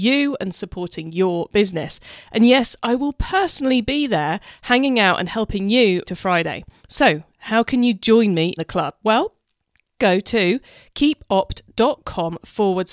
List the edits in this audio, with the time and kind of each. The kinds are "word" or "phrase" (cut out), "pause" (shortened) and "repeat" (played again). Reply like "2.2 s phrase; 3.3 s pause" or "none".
6.1 s word; 6.8 s pause; 8.6 s word; 10.0 s word